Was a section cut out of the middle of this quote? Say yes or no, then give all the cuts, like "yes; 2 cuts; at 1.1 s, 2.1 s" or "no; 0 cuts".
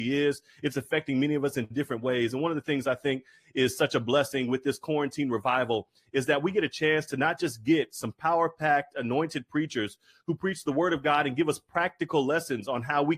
no; 0 cuts